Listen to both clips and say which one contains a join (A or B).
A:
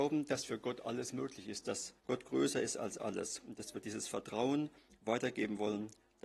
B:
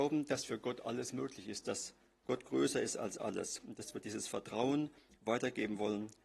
A